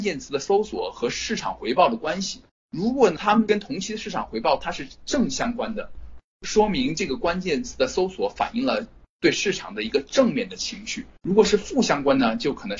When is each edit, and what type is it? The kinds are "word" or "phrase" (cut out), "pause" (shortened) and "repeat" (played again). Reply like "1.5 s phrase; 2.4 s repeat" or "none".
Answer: 2.5 s pause; 11.2 s pause